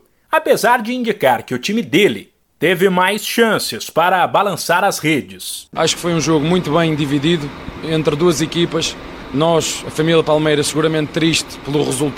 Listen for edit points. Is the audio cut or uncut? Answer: uncut